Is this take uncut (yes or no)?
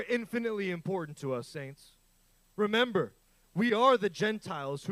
yes